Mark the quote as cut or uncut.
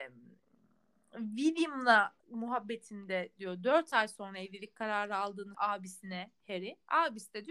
cut